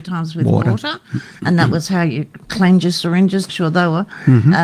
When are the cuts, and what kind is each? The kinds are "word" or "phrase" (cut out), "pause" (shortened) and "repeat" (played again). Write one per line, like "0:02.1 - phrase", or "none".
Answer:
0:03.5 - word